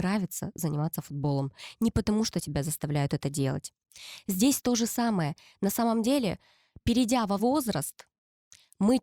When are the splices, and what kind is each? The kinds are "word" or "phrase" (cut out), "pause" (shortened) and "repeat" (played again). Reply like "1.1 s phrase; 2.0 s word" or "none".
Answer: 7.4 s word